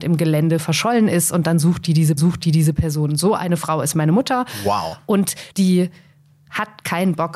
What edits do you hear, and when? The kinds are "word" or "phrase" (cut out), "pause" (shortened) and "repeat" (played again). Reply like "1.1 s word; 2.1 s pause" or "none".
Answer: 2.2 s repeat; 5.5 s pause